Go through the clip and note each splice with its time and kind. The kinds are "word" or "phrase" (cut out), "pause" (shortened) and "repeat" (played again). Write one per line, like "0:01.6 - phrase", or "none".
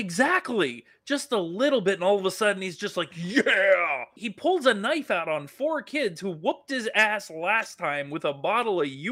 none